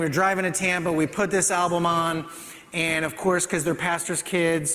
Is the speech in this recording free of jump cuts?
yes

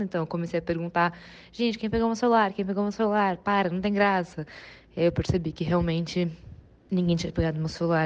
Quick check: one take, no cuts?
yes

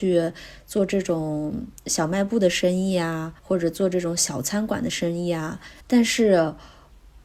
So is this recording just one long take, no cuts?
no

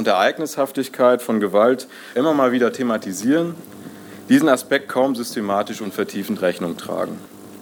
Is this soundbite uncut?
no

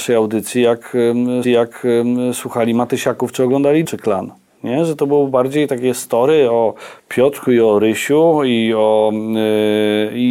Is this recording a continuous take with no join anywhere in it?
no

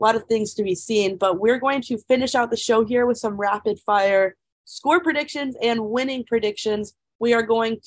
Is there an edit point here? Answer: no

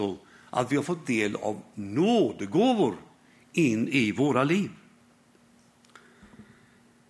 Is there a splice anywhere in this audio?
no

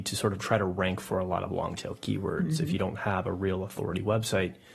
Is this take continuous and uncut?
yes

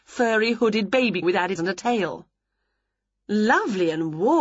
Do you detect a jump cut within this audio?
yes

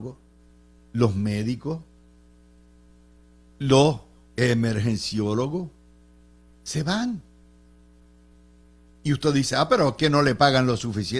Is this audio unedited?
yes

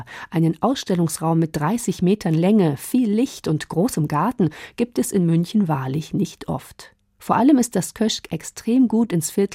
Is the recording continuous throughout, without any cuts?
yes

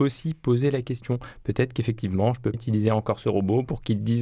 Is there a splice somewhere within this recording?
yes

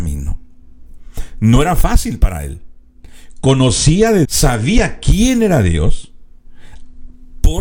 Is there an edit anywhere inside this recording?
yes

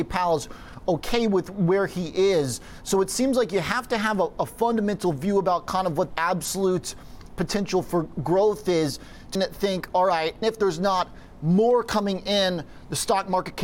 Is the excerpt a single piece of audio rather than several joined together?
no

